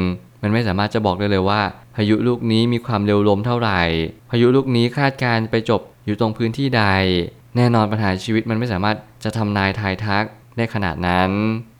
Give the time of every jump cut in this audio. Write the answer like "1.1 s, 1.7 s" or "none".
none

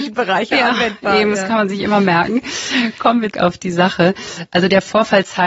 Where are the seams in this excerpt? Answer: 3.3 s

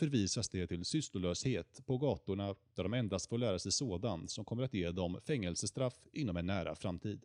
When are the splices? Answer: none

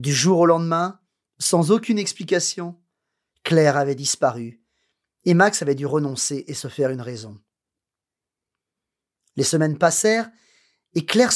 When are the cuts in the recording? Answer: none

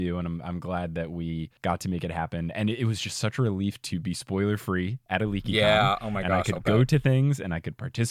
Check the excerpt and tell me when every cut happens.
1.6 s

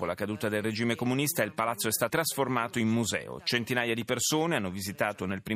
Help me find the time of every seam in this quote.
2.1 s

